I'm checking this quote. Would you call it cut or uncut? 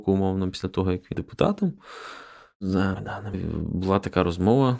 cut